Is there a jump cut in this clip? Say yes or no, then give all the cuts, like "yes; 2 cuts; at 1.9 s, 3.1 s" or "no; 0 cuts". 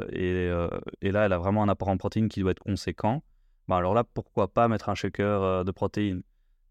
no; 0 cuts